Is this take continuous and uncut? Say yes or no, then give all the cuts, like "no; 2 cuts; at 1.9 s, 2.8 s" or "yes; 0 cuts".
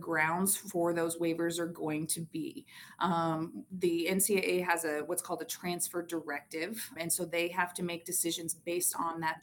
no; 1 cut; at 7.0 s